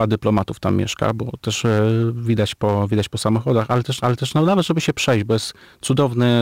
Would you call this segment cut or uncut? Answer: cut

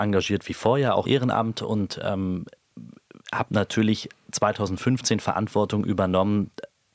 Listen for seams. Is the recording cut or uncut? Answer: cut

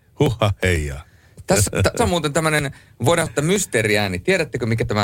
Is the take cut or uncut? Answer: cut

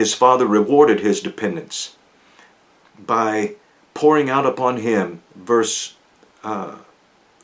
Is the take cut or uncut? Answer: uncut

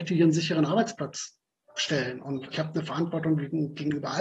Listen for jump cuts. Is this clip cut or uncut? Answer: cut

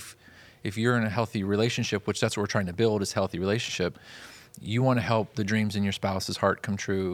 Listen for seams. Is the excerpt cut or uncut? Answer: uncut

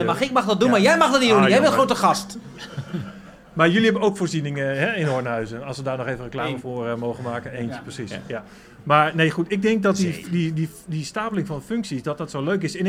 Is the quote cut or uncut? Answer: uncut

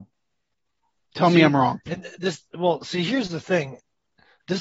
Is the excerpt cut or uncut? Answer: uncut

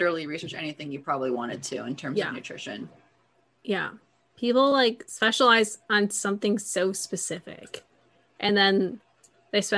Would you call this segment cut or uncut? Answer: uncut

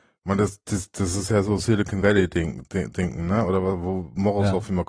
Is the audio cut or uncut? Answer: uncut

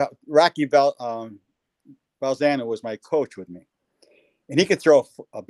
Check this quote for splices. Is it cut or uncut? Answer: uncut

